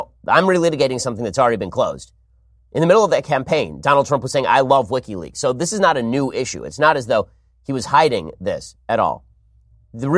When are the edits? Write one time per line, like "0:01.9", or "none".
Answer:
none